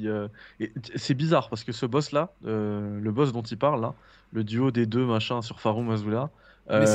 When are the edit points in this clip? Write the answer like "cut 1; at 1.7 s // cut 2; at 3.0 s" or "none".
cut 1; at 2.4 s